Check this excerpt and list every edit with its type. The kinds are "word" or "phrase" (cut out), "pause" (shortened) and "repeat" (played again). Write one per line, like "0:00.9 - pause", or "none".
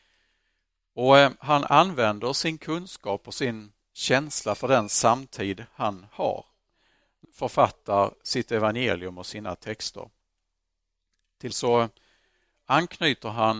0:07.2 - word
0:11.5 - word